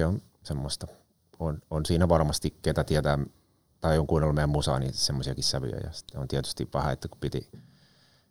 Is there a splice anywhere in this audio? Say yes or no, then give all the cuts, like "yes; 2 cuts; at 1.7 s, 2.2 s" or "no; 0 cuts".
no; 0 cuts